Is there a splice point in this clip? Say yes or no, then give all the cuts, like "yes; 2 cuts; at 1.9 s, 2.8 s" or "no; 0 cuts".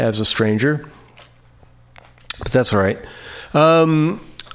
no; 0 cuts